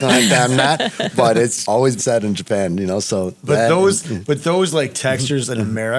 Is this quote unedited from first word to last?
no; 2 cuts; at 1.6 s, 2.0 s

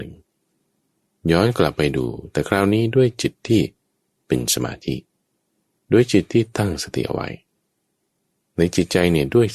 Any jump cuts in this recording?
no; 0 cuts

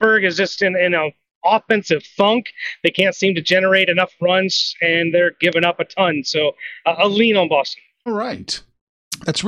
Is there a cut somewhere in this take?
no; 0 cuts

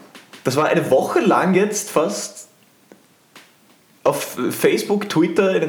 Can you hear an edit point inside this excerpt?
no; 0 cuts

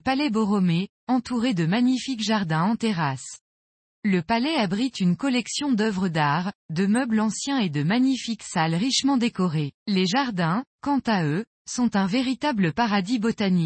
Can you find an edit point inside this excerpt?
yes; 1 cut; at 9.8 s

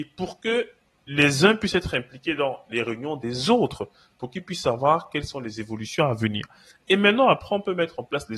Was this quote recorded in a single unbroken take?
yes; 0 cuts

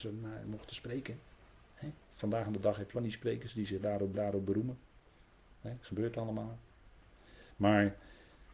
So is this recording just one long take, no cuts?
no; 3 cuts; at 2.0 s, 2.9 s, 4.1 s

